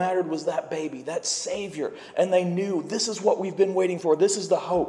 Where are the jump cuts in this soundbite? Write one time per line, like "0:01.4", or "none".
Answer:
none